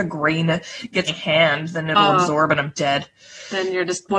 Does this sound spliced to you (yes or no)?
yes